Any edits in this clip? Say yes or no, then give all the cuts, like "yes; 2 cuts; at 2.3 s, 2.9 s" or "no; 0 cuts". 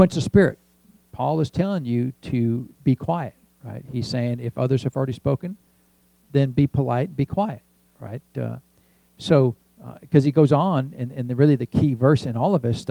no; 0 cuts